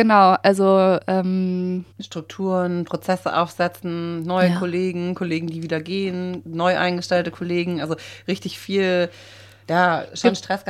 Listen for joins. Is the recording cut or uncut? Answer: cut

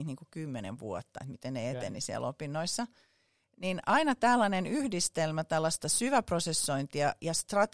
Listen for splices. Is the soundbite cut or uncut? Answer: uncut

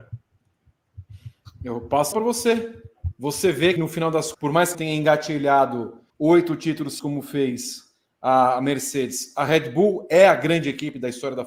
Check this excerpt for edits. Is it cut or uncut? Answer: cut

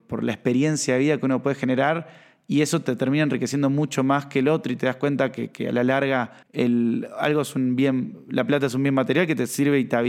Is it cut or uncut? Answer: cut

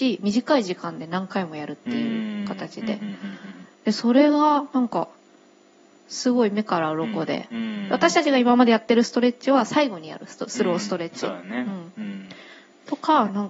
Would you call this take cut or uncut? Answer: uncut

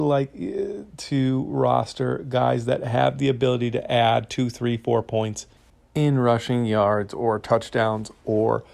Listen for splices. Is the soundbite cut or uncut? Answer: uncut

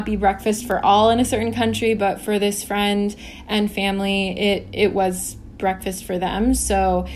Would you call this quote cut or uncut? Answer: uncut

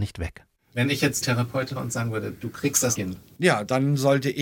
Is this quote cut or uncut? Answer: cut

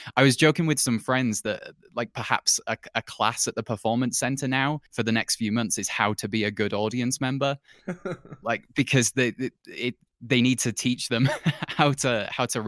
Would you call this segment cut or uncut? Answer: cut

